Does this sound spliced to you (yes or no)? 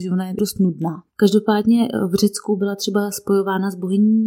yes